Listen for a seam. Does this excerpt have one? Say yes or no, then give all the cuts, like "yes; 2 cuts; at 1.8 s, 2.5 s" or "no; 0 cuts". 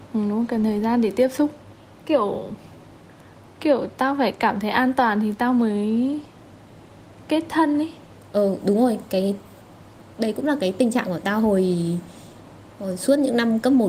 no; 0 cuts